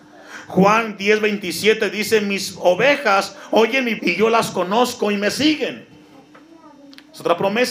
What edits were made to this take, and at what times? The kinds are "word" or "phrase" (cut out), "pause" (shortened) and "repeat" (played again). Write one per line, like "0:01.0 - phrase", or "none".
0:04.0 - word